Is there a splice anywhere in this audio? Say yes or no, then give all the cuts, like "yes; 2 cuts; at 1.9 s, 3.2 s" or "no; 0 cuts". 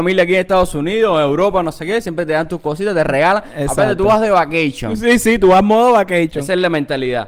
no; 0 cuts